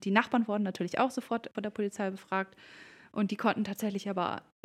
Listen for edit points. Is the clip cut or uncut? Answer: uncut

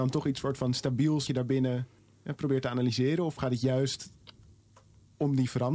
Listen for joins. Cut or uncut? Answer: cut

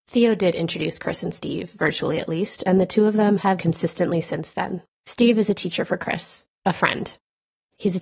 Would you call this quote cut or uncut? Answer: cut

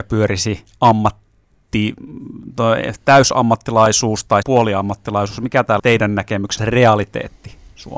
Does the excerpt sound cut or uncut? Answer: cut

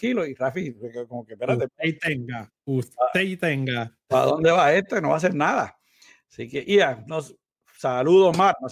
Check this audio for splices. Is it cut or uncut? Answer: uncut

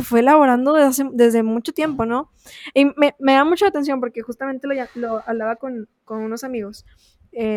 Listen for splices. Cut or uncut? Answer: uncut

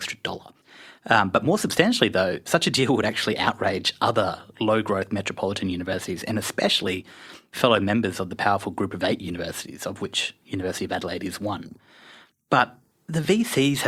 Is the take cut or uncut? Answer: uncut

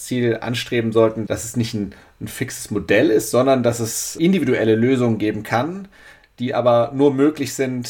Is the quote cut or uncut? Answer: uncut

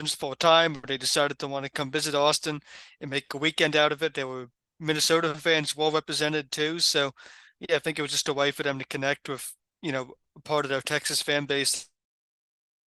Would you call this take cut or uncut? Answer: uncut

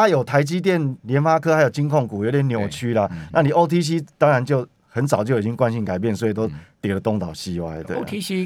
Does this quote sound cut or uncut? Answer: uncut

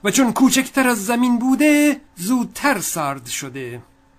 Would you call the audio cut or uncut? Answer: cut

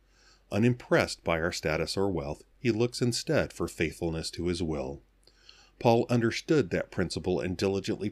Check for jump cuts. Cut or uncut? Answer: uncut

